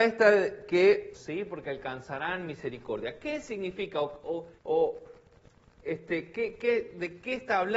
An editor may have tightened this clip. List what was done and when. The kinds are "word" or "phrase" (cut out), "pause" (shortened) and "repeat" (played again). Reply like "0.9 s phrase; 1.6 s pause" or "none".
1.1 s phrase; 4.6 s pause